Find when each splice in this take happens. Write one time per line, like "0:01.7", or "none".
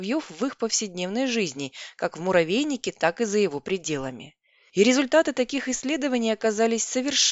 none